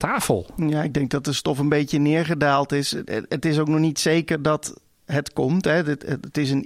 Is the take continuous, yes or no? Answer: yes